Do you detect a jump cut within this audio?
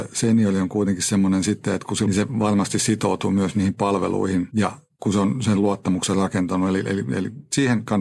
yes; 1 cut; at 2.1 s

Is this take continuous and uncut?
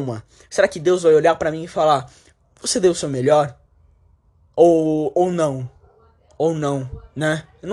yes; 0 cuts

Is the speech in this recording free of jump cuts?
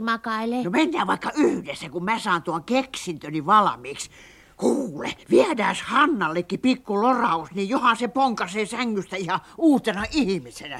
no; 1 cut; at 5.2 s

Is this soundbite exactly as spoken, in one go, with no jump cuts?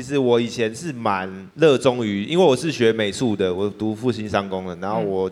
no; 1 cut; at 1.5 s

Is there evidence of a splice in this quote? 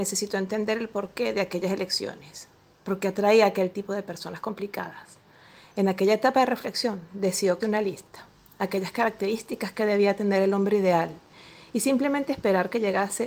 yes; 1 cut; at 7.6 s

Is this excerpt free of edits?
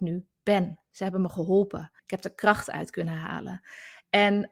no; 1 cut; at 2.0 s

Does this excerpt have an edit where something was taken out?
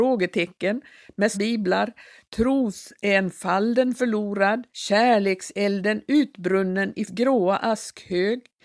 yes; 3 cuts; at 1.3 s, 4.7 s, 7.1 s

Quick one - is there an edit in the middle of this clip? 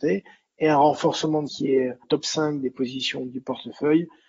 yes; 2 cuts; at 1.5 s, 2.0 s

